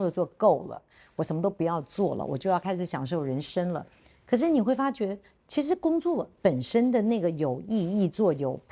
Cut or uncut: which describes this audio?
uncut